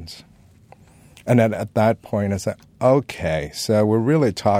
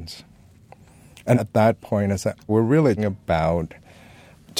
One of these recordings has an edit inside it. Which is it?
second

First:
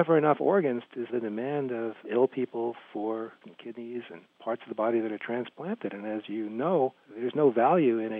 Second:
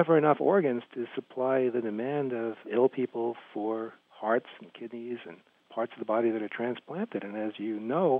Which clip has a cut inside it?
first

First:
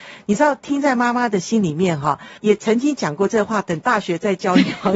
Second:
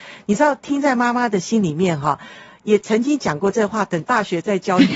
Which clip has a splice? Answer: first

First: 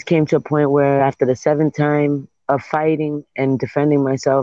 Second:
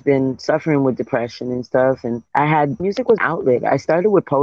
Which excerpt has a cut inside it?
second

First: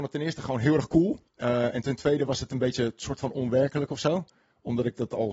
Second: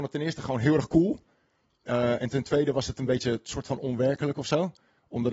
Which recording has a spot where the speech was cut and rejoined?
first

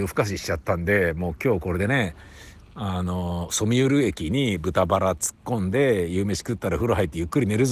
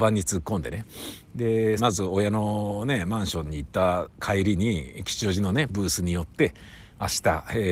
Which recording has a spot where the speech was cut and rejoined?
second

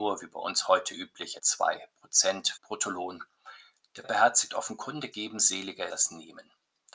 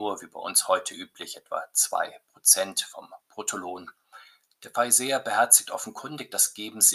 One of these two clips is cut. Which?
first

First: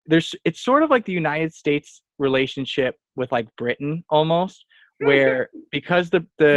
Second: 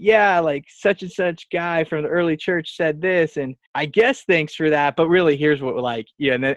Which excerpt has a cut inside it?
second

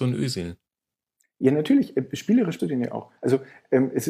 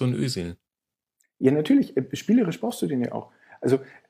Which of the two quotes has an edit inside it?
first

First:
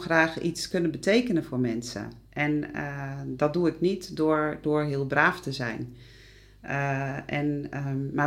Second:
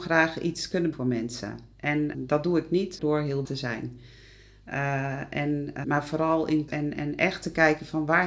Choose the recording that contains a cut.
second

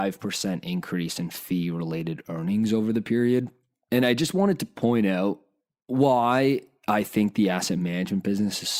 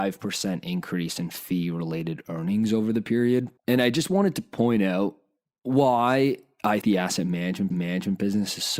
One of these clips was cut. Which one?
second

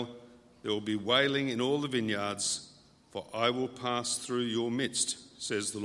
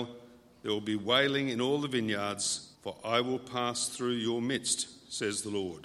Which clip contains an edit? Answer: second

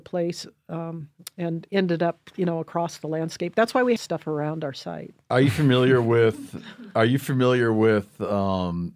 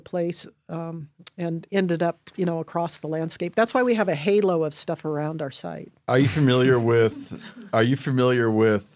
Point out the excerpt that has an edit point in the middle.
first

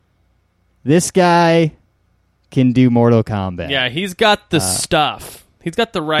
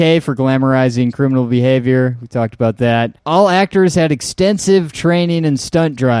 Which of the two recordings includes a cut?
second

